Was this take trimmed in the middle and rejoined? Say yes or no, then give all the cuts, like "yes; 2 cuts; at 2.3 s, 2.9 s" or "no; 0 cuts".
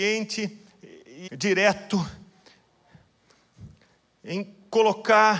yes; 1 cut; at 1.3 s